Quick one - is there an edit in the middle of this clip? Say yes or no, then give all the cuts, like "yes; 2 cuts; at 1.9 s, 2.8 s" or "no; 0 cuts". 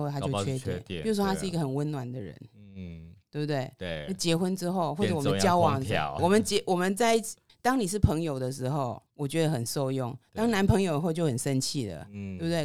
yes; 3 cuts; at 6.2 s, 7.5 s, 9.1 s